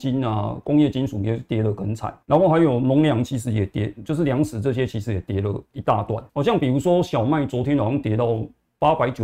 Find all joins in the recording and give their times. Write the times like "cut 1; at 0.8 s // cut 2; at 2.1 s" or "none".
cut 1; at 2.2 s // cut 2; at 6.3 s